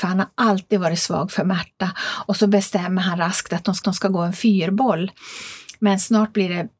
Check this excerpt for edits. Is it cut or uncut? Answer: cut